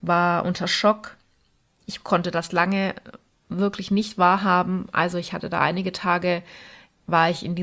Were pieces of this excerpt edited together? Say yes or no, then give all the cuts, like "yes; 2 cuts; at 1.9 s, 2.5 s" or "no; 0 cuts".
no; 0 cuts